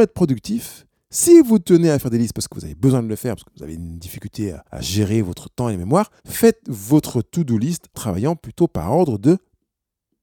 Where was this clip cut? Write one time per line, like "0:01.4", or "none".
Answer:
0:04.7
0:06.2
0:07.9